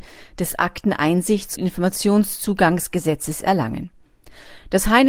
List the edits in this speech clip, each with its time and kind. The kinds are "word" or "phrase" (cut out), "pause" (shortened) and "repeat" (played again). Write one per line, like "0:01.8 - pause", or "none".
0:01.6 - word